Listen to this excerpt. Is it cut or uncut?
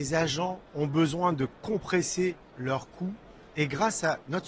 uncut